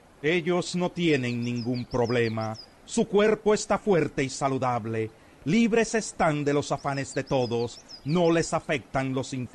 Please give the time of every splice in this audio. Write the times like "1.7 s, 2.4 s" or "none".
none